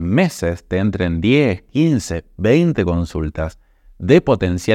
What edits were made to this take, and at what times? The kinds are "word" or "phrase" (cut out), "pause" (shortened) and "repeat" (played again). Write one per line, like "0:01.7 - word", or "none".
none